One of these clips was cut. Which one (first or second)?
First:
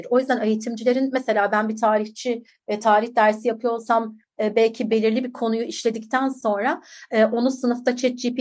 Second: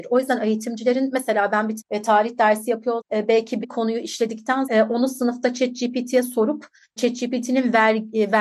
second